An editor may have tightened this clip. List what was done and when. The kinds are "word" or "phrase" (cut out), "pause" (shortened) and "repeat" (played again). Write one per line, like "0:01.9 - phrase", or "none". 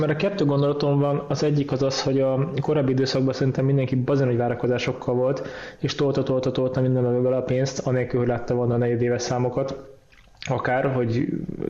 none